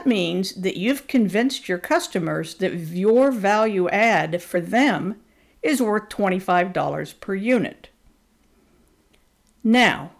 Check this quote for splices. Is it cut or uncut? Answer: uncut